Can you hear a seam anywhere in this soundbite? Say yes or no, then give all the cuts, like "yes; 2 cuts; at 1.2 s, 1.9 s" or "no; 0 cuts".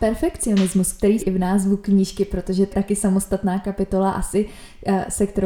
yes; 2 cuts; at 1.2 s, 2.7 s